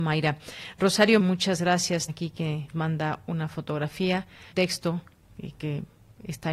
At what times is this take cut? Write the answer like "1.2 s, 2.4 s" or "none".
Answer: 1.2 s, 2.1 s, 2.7 s, 4.5 s